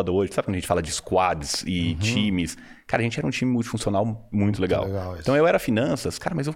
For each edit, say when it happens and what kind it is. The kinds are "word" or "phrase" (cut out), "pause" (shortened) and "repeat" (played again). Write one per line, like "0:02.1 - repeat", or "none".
0:04.3 - word